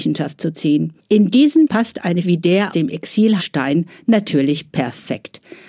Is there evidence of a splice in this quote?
yes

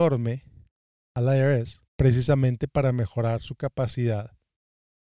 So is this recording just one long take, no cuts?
no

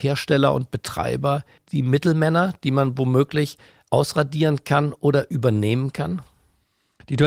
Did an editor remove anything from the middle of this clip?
no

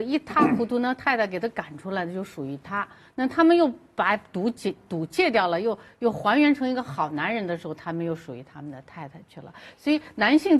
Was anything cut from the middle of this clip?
no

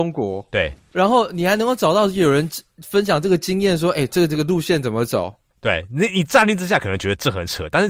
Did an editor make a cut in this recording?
no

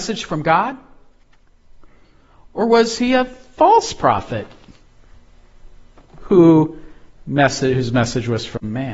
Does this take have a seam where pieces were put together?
no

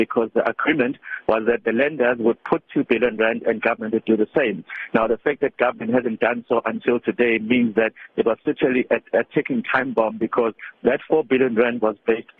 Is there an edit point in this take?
no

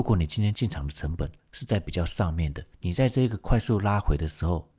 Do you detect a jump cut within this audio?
yes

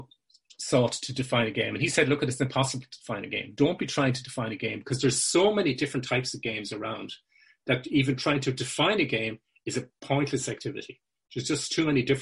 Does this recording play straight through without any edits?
yes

